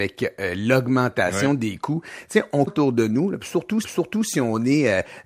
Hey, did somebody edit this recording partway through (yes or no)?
yes